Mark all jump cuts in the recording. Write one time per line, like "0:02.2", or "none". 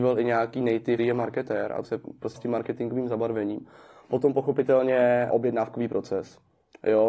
0:01.0
0:01.8
0:02.4
0:05.3